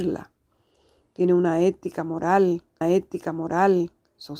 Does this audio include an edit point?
yes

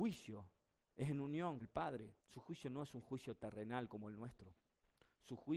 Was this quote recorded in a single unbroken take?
no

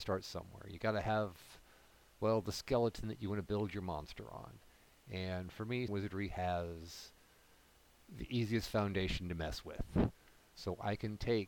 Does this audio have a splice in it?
yes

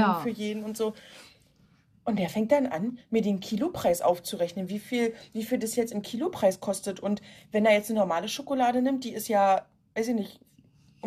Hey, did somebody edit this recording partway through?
no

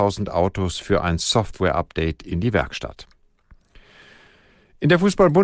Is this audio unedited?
yes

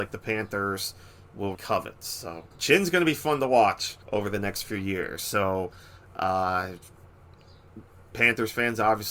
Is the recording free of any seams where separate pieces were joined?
no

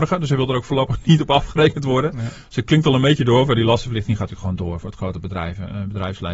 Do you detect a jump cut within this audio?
no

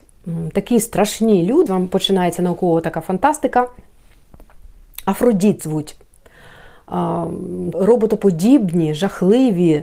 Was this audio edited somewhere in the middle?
yes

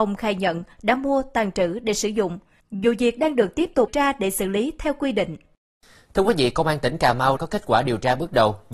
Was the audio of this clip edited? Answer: yes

